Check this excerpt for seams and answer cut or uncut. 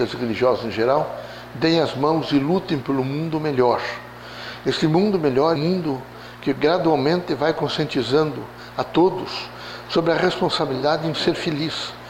cut